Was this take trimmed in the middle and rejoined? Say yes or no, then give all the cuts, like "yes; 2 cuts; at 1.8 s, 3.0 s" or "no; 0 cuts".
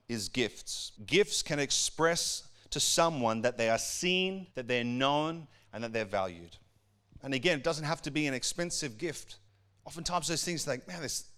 yes; 3 cuts; at 1.0 s, 4.5 s, 9.5 s